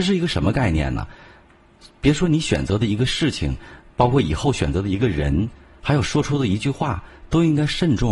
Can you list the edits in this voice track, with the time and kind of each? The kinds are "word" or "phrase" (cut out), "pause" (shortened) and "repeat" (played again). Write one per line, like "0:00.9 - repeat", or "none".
none